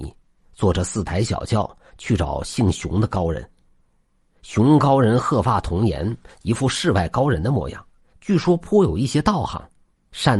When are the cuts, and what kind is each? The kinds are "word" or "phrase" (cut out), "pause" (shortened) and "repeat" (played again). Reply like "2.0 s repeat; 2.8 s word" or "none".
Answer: 8.0 s pause